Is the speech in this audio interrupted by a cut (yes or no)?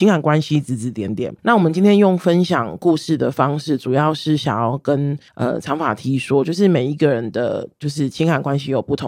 yes